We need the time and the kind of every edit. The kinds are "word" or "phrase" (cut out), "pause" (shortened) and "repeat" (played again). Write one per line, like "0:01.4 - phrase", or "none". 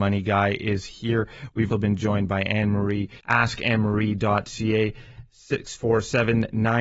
0:01.7 - word
0:03.2 - pause